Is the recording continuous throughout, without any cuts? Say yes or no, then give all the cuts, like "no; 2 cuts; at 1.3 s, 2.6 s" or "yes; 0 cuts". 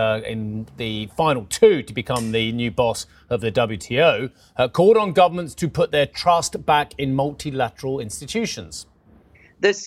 yes; 0 cuts